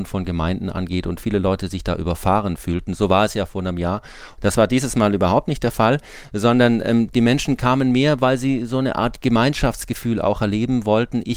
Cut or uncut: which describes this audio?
uncut